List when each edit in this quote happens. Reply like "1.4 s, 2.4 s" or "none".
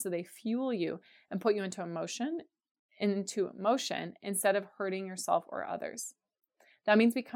none